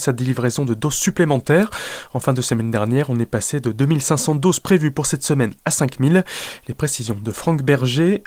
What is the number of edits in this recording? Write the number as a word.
zero